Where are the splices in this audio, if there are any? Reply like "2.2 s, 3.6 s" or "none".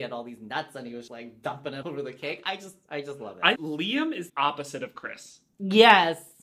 1.1 s, 1.8 s, 3.6 s, 4.3 s